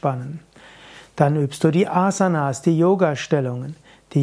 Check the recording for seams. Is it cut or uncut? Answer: uncut